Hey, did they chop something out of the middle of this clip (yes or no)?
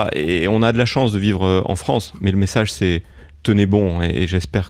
no